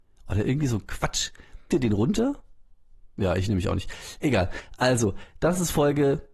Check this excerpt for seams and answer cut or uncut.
cut